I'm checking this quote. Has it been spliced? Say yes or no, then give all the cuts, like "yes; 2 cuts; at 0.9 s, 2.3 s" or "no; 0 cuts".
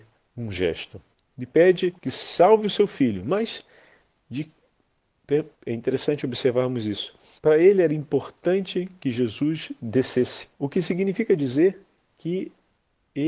yes; 5 cuts; at 1.1 s, 2.0 s, 5.5 s, 7.4 s, 10.5 s